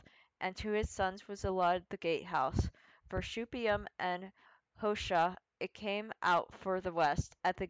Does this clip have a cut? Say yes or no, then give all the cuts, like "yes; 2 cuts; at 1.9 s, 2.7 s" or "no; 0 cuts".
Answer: yes; 1 cut; at 4.5 s